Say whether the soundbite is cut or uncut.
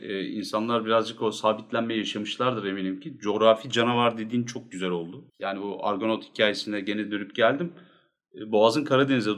cut